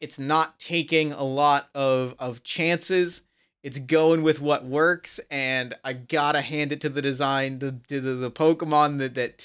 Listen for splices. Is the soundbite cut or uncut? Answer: uncut